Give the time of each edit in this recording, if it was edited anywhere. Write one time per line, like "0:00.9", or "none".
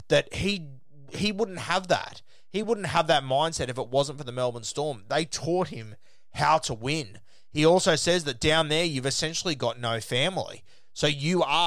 none